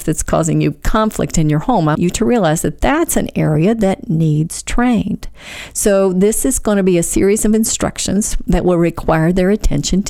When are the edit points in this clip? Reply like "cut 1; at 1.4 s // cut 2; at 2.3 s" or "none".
cut 1; at 1.9 s